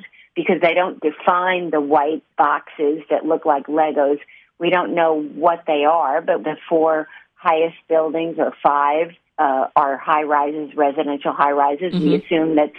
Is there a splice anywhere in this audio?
yes; 3 cuts; at 2.3 s, 6.4 s, 9.3 s

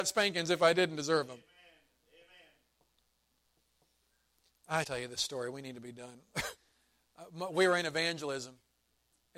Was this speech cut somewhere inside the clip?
yes; 2 cuts; at 4.8 s, 6.6 s

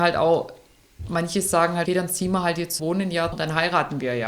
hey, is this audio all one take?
no; 3 cuts; at 1.9 s, 2.8 s, 3.3 s

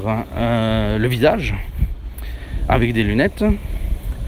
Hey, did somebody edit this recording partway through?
no; 0 cuts

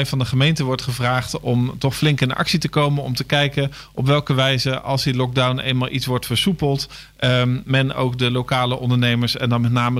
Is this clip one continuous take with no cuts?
yes; 0 cuts

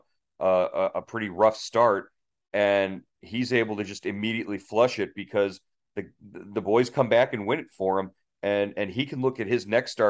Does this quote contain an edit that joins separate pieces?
no; 0 cuts

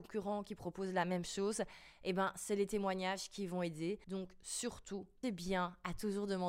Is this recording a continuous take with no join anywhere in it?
no; 2 cuts; at 4.0 s, 5.2 s

